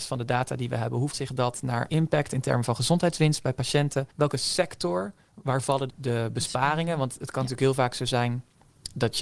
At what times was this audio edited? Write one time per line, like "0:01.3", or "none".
0:01.1
0:01.9
0:05.9